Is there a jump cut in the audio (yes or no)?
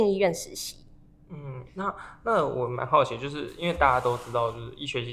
no